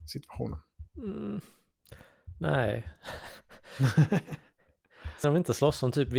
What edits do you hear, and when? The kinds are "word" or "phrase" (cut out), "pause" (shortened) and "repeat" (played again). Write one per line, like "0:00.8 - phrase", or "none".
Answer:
0:05.2 - word